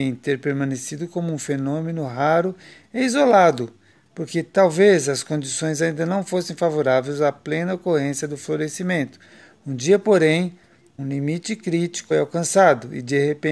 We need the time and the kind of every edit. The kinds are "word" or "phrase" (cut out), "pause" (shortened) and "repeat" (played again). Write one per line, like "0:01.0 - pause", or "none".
0:11.0 - word
0:12.1 - word